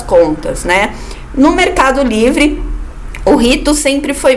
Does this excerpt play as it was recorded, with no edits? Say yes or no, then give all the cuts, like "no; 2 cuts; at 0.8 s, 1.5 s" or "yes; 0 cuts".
yes; 0 cuts